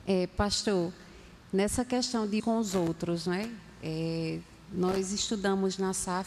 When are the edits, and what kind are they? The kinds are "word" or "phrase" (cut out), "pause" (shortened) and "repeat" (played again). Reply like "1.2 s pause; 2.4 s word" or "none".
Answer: 2.4 s word

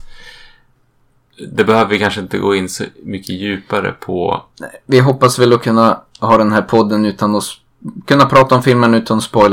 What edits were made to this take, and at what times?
4.5 s pause

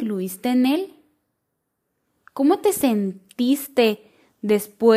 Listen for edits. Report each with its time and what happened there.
none

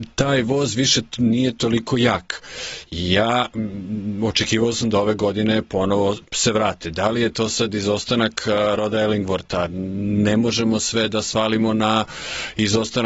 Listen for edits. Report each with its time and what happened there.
none

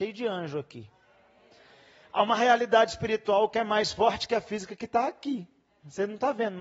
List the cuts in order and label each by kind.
none

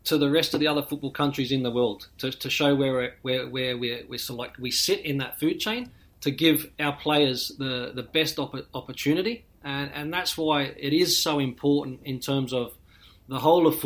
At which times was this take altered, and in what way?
6.0 s pause

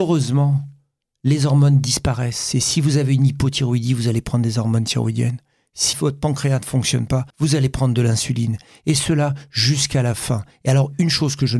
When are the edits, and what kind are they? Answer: 5.9 s word; 7.3 s pause

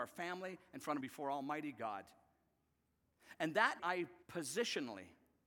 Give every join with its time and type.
1.0 s phrase; 3.8 s word; 4.2 s pause

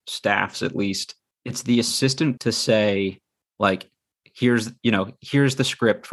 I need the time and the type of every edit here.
1.3 s pause; 2.4 s phrase

